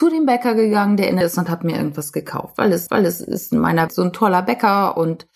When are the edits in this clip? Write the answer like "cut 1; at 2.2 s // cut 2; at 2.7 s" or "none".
cut 1; at 1.2 s // cut 2; at 2.9 s // cut 3; at 3.9 s

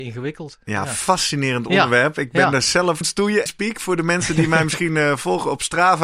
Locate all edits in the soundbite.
cut 1; at 3.0 s // cut 2; at 3.5 s

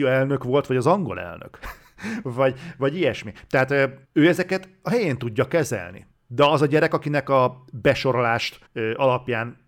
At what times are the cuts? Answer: cut 1; at 4.0 s // cut 2; at 6.1 s // cut 3; at 8.6 s

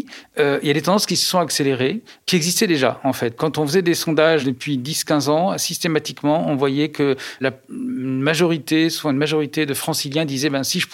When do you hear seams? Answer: cut 1; at 4.4 s // cut 2; at 7.4 s

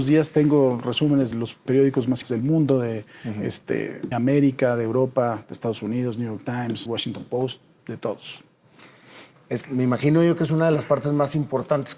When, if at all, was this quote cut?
cut 1; at 1.3 s // cut 2; at 1.7 s // cut 3; at 2.2 s // cut 4; at 4.1 s // cut 5; at 6.9 s // cut 6; at 9.6 s

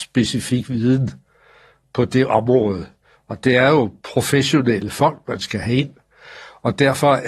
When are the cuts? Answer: none

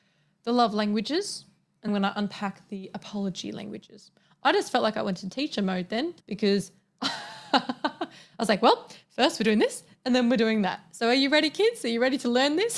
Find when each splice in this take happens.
cut 1; at 1.9 s // cut 2; at 6.2 s

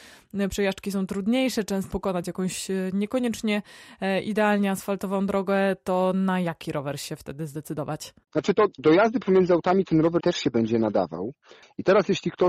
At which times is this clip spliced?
cut 1; at 1.9 s // cut 2; at 10.2 s

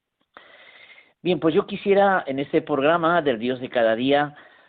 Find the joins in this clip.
none

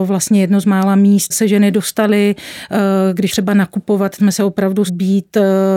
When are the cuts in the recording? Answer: cut 1; at 1.3 s // cut 2; at 3.3 s // cut 3; at 4.2 s // cut 4; at 4.9 s

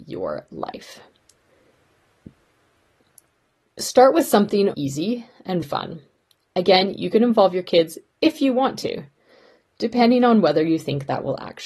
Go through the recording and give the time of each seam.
cut 1; at 4.7 s // cut 2; at 5.6 s

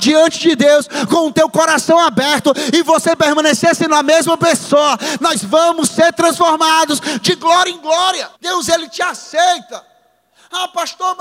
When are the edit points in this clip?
cut 1; at 8.3 s

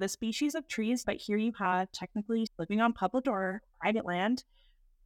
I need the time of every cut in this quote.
cut 1; at 1.0 s // cut 2; at 2.5 s // cut 3; at 3.2 s

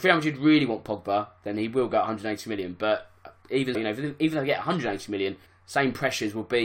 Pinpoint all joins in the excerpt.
cut 1; at 3.7 s // cut 2; at 5.5 s

